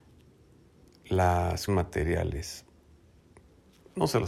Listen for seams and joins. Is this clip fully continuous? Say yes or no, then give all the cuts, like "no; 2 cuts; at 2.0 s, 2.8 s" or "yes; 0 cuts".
no; 1 cut; at 1.7 s